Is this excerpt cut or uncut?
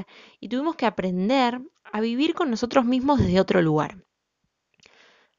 cut